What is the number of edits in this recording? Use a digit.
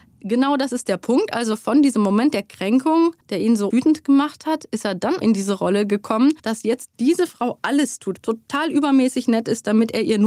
5